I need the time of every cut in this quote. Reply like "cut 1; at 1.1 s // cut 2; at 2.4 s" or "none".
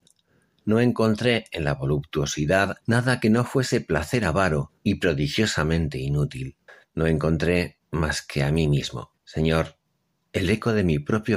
cut 1; at 2.8 s // cut 2; at 4.8 s // cut 3; at 6.7 s // cut 4; at 9.2 s